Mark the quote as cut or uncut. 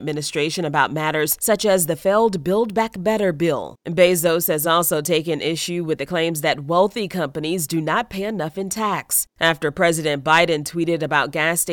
uncut